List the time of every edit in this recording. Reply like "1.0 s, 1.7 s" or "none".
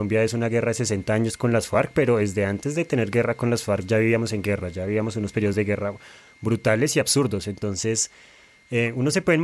none

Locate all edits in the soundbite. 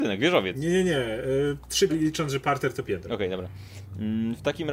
1.9 s, 2.8 s

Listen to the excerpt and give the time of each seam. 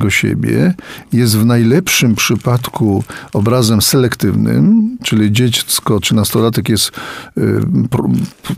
none

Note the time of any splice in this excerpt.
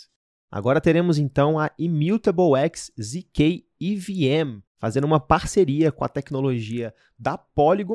4.7 s

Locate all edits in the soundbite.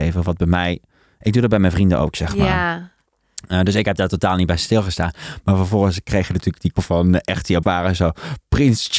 6.8 s, 7.6 s

